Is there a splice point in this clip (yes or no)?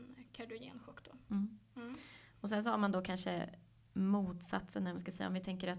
no